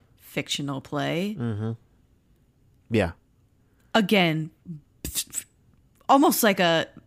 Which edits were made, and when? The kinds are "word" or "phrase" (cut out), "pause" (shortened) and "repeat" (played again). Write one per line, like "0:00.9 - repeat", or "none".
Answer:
none